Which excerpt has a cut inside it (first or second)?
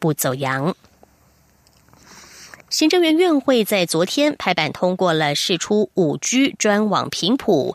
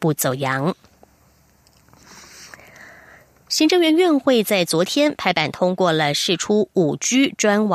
first